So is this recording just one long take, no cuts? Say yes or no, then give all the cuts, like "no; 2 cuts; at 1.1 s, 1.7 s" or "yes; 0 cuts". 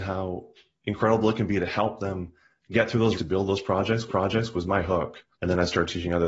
no; 3 cuts; at 3.1 s, 4.1 s, 5.3 s